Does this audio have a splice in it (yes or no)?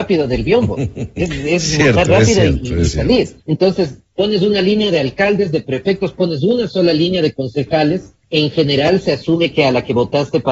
yes